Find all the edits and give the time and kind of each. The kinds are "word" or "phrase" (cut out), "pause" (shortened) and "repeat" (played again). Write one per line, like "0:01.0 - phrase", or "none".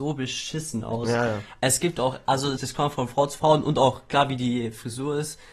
0:02.6 - phrase